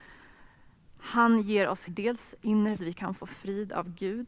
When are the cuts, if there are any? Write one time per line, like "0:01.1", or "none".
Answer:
0:01.9
0:02.8